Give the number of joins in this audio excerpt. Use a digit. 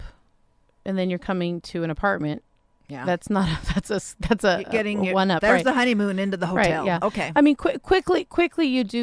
0